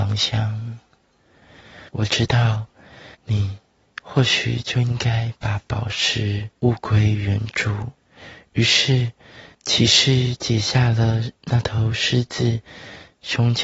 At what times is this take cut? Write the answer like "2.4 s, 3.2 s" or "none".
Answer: 1.9 s, 3.1 s, 6.6 s, 8.0 s, 9.5 s

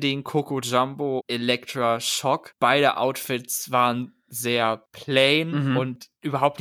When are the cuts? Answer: 1.2 s

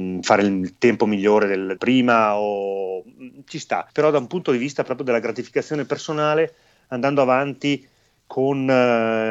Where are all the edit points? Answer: 1.8 s, 3.9 s

